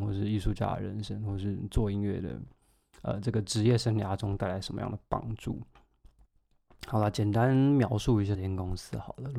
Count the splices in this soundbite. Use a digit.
1